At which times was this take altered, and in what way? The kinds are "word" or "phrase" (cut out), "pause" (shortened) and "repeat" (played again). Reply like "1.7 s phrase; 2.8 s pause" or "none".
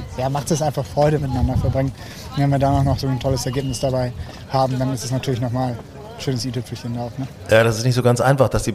1.2 s phrase